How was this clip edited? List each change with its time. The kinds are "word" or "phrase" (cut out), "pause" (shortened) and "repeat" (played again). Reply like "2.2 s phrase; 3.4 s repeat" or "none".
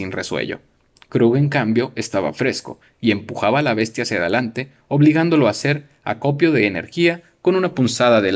none